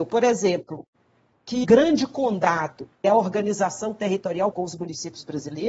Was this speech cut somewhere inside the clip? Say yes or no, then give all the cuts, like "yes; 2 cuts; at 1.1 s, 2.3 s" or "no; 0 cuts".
yes; 3 cuts; at 1.6 s, 3.0 s, 4.5 s